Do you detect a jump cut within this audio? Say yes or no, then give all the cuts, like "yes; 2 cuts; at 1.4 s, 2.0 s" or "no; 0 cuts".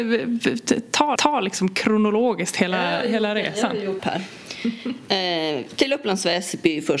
yes; 2 cuts; at 1.2 s, 4.0 s